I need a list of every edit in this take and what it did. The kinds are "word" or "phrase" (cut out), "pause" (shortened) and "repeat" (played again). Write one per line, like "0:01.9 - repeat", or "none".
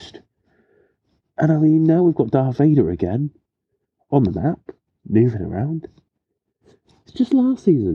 none